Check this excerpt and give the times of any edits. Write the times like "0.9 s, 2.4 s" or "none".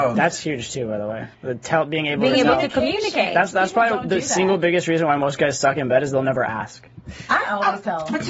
1.3 s